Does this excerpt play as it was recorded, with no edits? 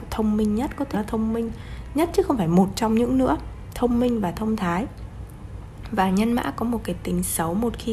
no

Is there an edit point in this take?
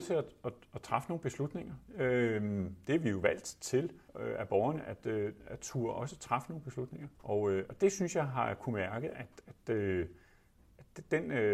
yes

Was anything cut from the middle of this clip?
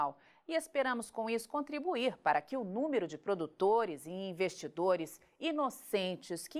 no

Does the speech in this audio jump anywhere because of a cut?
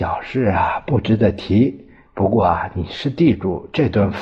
no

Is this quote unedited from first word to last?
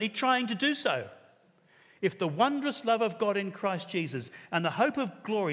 yes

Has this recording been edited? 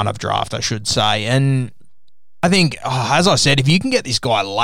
no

